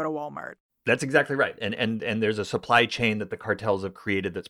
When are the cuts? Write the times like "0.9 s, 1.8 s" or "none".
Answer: none